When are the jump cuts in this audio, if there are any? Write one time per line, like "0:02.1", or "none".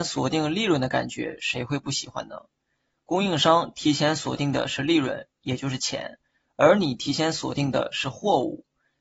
none